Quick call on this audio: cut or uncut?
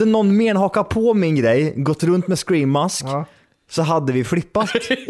uncut